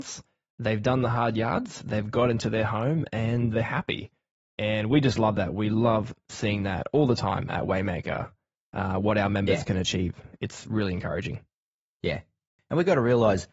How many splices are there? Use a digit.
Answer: 0